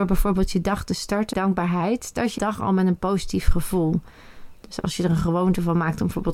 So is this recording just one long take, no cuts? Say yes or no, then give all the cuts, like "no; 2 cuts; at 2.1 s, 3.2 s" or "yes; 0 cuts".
no; 2 cuts; at 1.3 s, 2.4 s